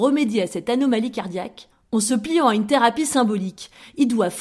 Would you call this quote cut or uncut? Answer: uncut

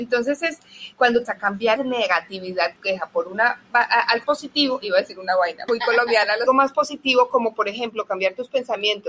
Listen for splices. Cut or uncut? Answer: cut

